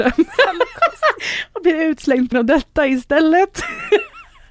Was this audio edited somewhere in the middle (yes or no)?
yes